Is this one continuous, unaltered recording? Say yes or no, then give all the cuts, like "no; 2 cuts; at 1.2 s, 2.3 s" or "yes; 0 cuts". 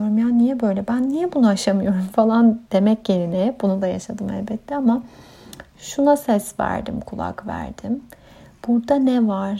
yes; 0 cuts